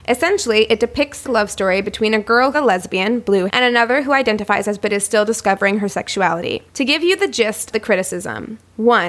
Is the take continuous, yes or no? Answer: no